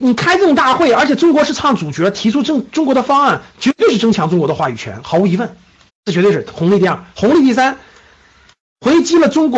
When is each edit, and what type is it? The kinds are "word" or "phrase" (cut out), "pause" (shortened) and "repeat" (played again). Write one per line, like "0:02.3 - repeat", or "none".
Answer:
0:05.9 - pause
0:07.1 - pause